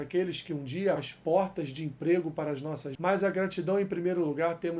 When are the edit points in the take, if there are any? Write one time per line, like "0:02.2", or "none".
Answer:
0:01.0
0:02.9